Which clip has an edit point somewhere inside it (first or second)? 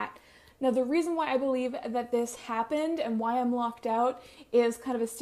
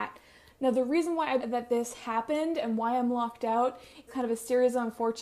second